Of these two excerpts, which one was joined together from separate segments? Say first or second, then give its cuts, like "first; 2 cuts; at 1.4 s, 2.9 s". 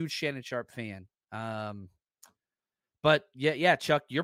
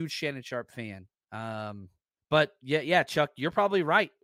second; 1 cut; at 2.2 s